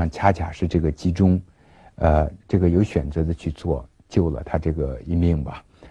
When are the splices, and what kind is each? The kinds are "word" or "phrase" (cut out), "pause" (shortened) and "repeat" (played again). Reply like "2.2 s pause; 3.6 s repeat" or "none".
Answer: 2.4 s pause